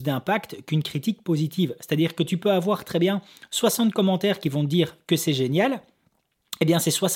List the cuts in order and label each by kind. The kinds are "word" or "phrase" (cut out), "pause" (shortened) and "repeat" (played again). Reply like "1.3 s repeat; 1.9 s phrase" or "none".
none